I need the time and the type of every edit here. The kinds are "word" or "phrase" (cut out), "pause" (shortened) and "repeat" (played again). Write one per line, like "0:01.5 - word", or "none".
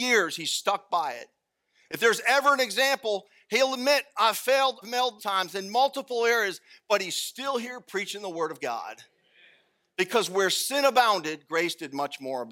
0:04.8 - word
0:05.2 - word